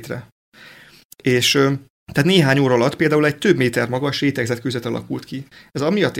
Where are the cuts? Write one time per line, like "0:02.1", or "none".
0:02.0